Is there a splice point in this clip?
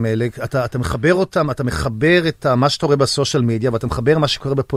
no; 0 cuts

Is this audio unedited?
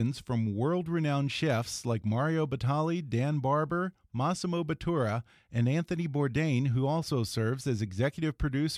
yes; 0 cuts

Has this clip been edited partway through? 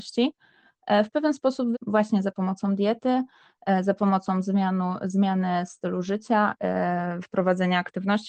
yes; 1 cut; at 1.7 s

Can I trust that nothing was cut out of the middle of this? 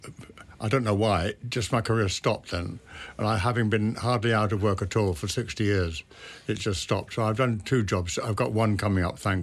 yes; 0 cuts

